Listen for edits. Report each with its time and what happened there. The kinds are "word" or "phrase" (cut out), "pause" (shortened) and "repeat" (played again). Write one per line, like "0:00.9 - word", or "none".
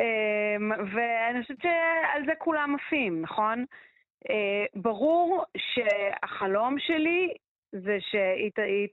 none